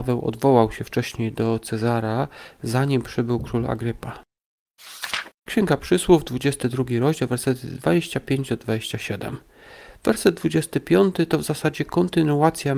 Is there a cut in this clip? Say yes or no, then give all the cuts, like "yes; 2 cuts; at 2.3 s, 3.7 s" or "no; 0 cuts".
yes; 1 cut; at 5.4 s